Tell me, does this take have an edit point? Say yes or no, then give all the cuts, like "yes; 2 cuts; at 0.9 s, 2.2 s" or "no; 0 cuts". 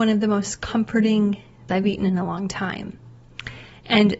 yes; 1 cut; at 1.7 s